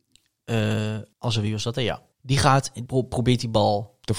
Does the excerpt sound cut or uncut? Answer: cut